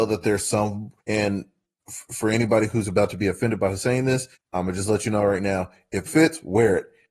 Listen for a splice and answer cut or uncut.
cut